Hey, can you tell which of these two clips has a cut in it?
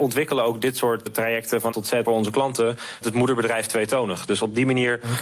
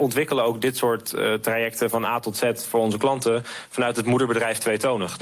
first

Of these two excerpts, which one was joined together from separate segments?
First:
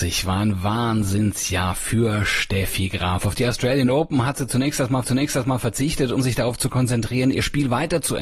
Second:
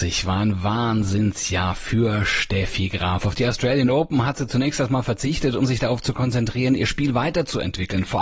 first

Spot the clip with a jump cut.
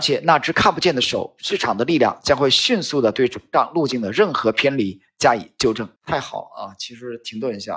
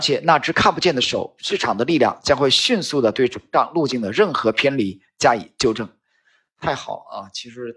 first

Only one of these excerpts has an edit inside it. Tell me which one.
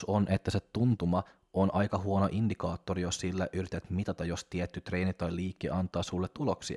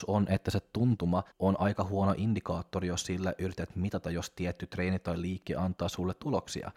second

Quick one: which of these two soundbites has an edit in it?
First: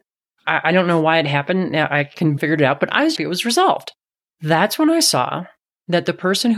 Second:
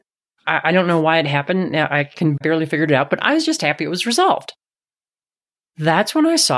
first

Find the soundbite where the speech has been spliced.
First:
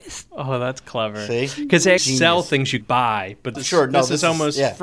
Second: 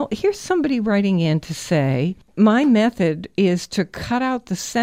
first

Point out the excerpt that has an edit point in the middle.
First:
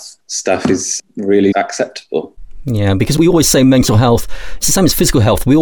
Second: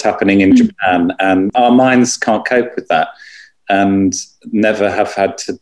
first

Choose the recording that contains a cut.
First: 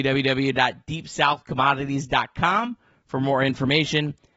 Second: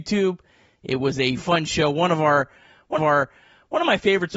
second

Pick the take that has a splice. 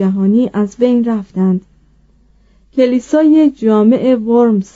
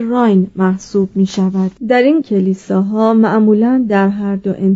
second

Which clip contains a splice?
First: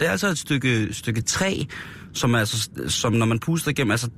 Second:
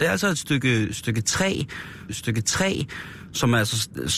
second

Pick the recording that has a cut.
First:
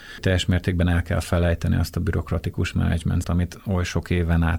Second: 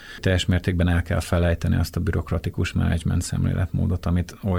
first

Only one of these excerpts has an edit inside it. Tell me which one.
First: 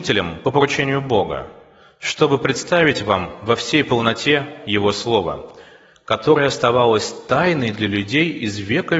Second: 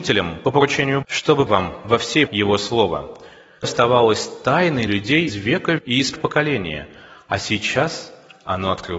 second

